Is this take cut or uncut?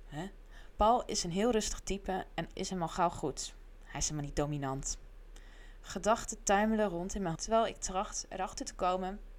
cut